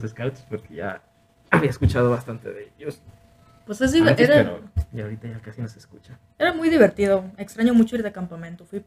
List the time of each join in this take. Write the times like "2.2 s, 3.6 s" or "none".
none